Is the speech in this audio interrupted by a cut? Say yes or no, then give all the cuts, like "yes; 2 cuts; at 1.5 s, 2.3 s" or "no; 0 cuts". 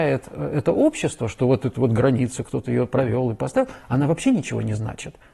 no; 0 cuts